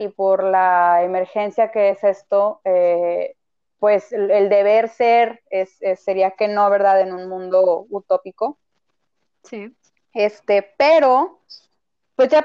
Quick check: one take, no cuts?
yes; 0 cuts

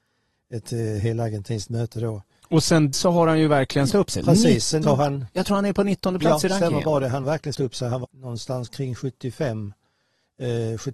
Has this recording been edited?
yes; 6 cuts; at 2.9 s, 3.9 s, 4.8 s, 7.2 s, 7.5 s, 8.0 s

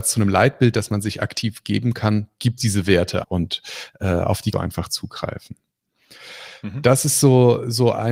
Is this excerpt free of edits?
no; 3 cuts; at 2.6 s, 3.2 s, 4.5 s

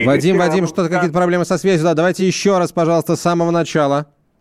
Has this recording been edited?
no; 0 cuts

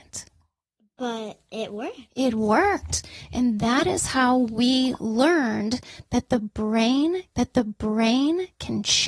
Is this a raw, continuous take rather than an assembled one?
no; 1 cut; at 7.3 s

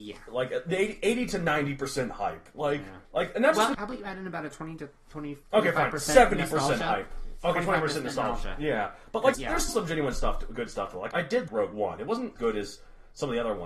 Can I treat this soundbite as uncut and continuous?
no; 8 cuts; at 3.0 s, 3.7 s, 5.4 s, 9.3 s, 9.7 s, 11.1 s, 11.5 s, 12.4 s

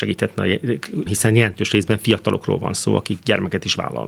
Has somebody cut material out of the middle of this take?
yes; 1 cut; at 1.1 s

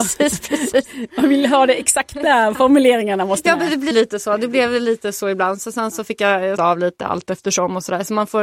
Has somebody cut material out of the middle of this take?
yes; 2 cuts; at 3.9 s, 6.6 s

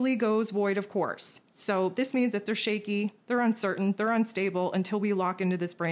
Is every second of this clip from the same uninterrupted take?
no; 1 cut; at 2.5 s

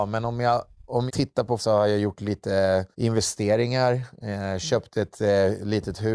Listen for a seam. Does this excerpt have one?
yes; 3 cuts; at 1.1 s, 1.6 s, 2.9 s

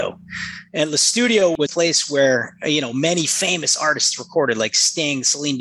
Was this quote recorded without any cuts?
no; 1 cut; at 1.7 s

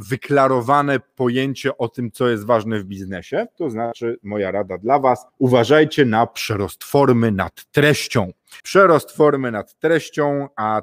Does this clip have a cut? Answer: yes; 2 cuts; at 5.3 s, 8.6 s

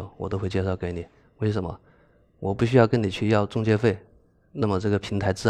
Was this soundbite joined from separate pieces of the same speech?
no; 0 cuts

